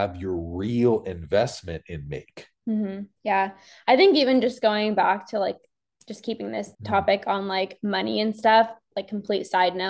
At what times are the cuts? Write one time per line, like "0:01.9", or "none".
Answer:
0:03.1
0:06.7